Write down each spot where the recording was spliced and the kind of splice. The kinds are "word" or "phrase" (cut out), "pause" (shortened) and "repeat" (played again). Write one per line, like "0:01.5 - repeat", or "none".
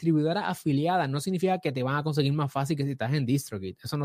none